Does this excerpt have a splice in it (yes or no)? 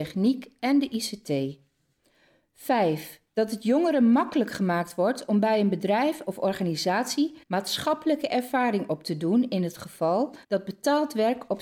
yes